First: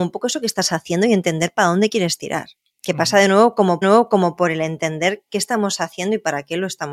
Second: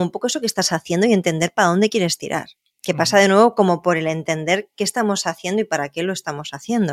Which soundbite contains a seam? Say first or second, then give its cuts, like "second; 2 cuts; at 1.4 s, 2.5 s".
first; 1 cut; at 3.8 s